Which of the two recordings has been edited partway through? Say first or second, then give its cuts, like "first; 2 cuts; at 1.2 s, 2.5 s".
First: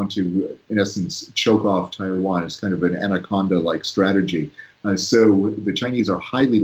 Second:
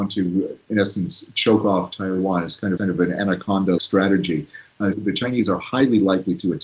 second; 3 cuts; at 2.8 s, 3.8 s, 4.9 s